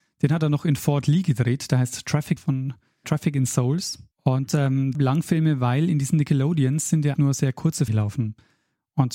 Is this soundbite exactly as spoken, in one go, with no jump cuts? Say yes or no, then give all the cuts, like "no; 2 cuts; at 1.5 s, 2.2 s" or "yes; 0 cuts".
no; 6 cuts; at 2.4 s, 3.0 s, 4.1 s, 4.9 s, 7.1 s, 7.9 s